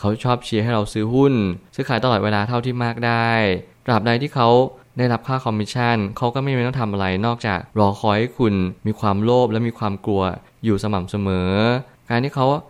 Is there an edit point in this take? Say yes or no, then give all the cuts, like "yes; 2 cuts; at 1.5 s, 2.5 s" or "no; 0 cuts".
yes; 2 cuts; at 7.7 s, 8.8 s